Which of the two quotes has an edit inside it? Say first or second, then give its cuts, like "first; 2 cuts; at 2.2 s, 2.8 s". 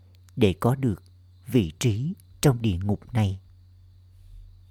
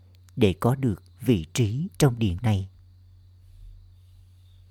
second; 3 cuts; at 1.1 s, 1.9 s, 2.4 s